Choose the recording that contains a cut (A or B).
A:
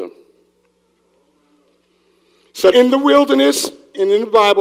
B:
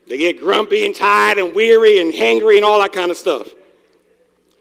A